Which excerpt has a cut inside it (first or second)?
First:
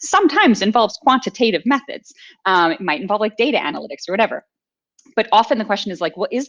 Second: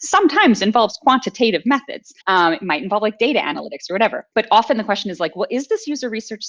second